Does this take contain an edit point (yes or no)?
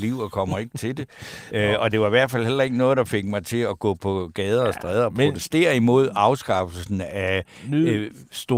no